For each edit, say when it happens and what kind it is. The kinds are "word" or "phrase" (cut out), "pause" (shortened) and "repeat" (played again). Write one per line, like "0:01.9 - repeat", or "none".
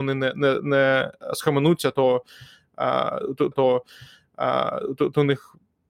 0:03.5 - repeat